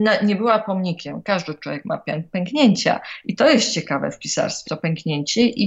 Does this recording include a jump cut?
yes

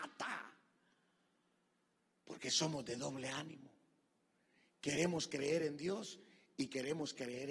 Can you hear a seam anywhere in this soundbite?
no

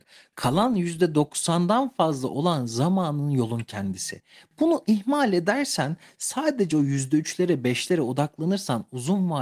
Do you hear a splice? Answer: no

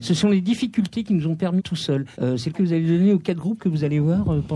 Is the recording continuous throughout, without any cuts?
no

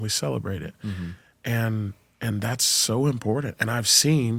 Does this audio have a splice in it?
no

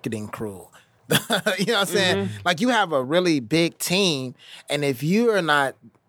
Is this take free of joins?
yes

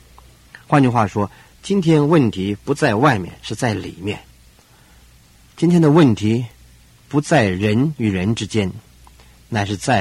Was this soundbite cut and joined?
no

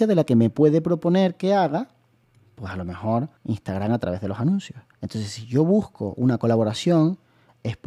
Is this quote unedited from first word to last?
no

